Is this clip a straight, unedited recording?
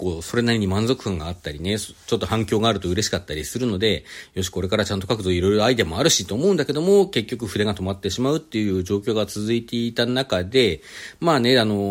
yes; 0 cuts

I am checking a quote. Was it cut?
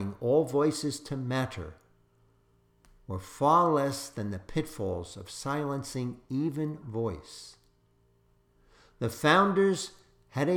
yes; 1 cut; at 6.8 s

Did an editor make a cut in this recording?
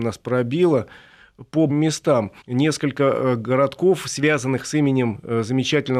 yes; 2 cuts; at 1.7 s, 2.4 s

